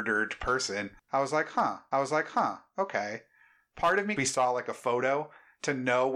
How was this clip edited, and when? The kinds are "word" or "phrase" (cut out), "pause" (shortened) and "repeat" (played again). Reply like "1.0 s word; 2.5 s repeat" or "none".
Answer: 1.0 s pause; 1.9 s repeat; 4.2 s phrase